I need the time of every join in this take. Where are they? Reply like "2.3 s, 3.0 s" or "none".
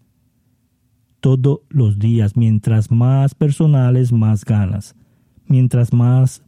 none